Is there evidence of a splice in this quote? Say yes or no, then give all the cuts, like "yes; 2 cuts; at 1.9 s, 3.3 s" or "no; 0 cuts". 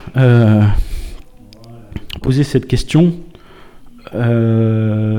yes; 2 cuts; at 2.2 s, 4.1 s